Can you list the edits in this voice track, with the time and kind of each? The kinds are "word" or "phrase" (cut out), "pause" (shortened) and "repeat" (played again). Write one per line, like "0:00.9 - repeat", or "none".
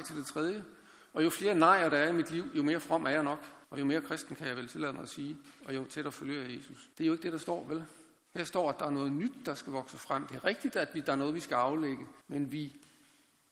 0:03.6 - pause
0:06.9 - pause
0:08.2 - pause
0:12.2 - pause